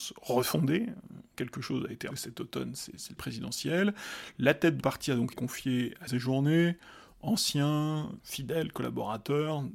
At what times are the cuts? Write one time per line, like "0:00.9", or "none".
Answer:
0:01.3
0:02.1
0:03.2
0:04.8
0:05.3
0:06.1
0:08.2